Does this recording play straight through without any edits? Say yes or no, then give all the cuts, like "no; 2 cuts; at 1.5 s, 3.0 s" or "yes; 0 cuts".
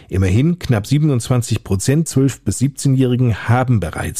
no; 1 cut; at 2.1 s